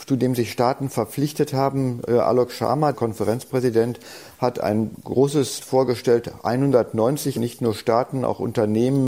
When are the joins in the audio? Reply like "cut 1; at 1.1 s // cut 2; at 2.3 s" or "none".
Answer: cut 1; at 2.9 s // cut 2; at 5.6 s // cut 3; at 7.4 s